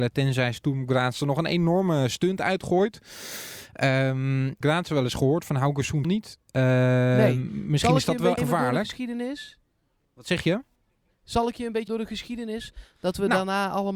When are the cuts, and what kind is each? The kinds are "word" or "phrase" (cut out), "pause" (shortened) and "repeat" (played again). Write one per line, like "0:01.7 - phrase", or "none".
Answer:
0:04.6 - phrase
0:06.0 - word
0:08.4 - word
0:11.9 - word